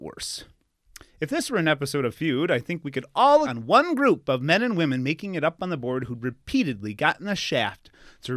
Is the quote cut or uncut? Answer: cut